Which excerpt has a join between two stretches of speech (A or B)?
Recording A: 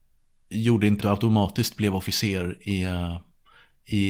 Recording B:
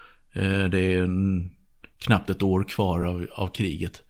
A